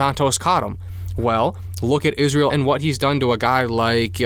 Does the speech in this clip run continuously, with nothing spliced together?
no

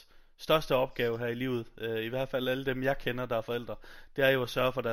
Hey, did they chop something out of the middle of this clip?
no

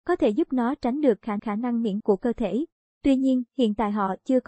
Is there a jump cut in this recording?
yes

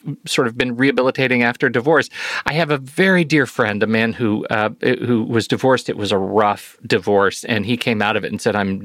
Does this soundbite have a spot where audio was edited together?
no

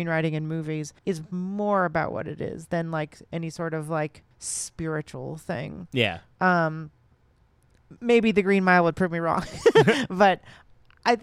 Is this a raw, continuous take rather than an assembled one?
no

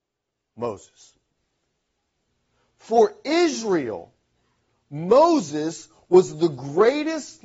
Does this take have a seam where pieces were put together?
no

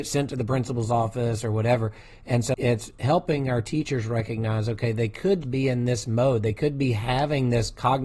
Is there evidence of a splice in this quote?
yes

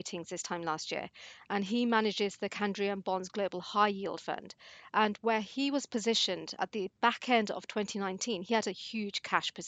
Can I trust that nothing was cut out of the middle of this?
yes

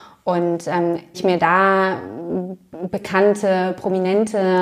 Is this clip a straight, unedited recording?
no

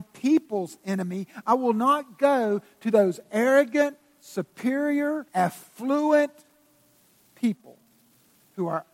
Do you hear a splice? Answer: yes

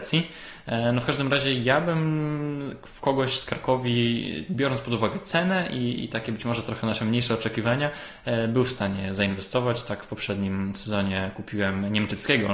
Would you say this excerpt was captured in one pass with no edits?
yes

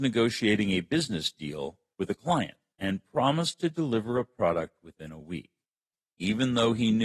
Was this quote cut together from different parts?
no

